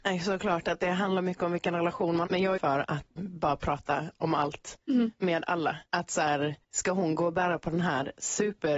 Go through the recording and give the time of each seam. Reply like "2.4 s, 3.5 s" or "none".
2.3 s, 2.6 s, 3.2 s, 4.8 s, 5.9 s, 6.6 s